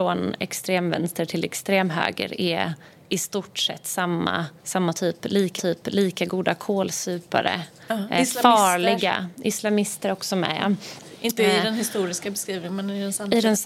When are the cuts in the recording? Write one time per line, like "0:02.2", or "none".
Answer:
0:04.6
0:05.6